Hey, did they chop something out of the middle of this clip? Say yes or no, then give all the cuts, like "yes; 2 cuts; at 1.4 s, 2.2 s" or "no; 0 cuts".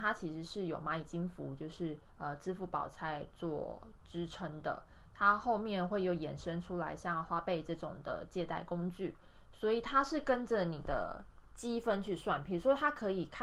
yes; 1 cut; at 2.1 s